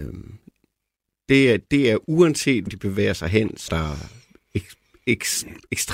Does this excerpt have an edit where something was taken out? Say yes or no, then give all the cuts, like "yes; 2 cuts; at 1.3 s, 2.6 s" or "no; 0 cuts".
yes; 2 cuts; at 2.7 s, 3.7 s